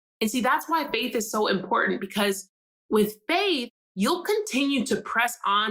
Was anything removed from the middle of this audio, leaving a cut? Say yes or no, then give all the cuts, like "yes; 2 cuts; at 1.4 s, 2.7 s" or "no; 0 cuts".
no; 0 cuts